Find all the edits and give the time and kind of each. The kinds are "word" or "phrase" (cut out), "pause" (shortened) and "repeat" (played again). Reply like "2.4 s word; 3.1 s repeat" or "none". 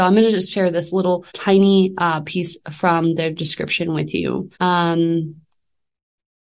1.3 s pause; 4.5 s pause